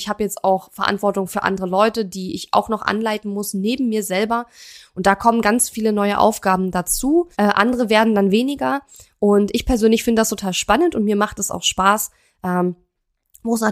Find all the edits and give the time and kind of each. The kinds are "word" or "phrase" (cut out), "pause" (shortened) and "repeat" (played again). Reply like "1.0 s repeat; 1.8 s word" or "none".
7.3 s pause